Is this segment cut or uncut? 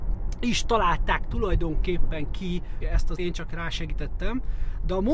cut